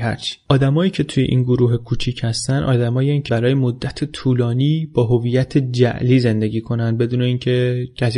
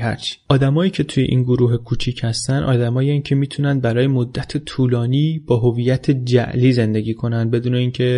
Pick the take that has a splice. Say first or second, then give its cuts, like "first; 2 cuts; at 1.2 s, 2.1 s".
first; 1 cut; at 3.3 s